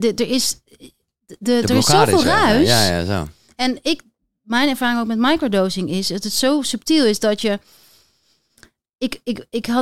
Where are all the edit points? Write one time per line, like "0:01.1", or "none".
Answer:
none